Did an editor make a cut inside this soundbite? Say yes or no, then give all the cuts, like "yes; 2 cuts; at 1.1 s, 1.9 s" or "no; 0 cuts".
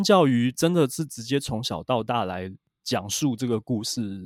no; 0 cuts